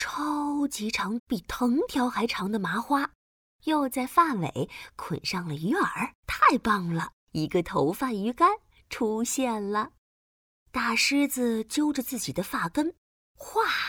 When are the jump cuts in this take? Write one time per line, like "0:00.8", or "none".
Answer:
0:01.2
0:06.2
0:07.2